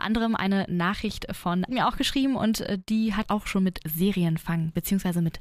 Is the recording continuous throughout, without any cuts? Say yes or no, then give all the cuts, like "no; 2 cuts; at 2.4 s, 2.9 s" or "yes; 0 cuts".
no; 2 cuts; at 1.7 s, 3.3 s